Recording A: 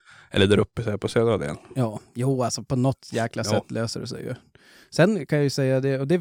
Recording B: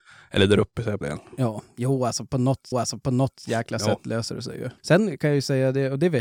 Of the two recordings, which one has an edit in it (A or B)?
B